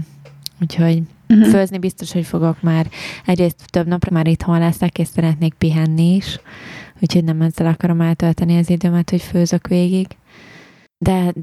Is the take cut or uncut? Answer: cut